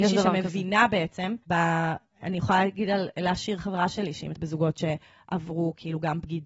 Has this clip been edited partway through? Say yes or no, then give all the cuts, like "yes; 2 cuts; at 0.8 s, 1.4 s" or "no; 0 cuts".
yes; 2 cuts; at 1.4 s, 4.3 s